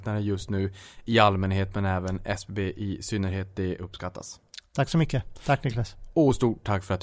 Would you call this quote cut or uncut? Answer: uncut